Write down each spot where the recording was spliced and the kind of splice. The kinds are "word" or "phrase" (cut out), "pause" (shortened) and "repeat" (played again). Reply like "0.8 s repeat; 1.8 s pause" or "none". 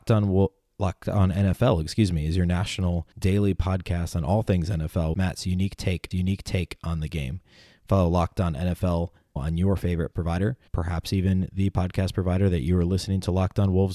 3.1 s pause; 5.1 s word; 6.1 s repeat; 9.4 s word; 10.1 s word; 10.7 s pause